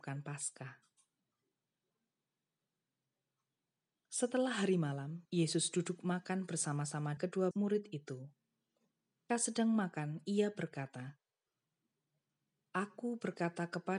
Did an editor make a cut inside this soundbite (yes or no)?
yes